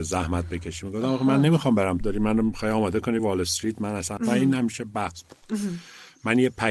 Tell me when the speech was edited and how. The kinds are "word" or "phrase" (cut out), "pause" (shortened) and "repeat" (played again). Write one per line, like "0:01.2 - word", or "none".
0:02.0 - phrase
0:03.2 - word
0:04.2 - phrase